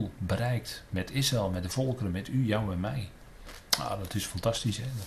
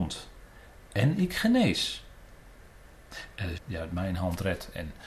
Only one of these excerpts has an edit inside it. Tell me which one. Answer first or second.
second